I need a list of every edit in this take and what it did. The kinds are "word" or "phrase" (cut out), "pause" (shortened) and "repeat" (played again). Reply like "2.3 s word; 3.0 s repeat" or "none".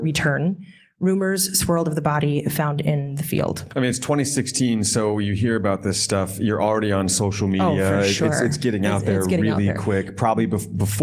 none